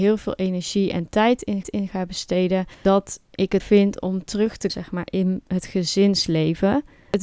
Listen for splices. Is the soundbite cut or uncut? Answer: cut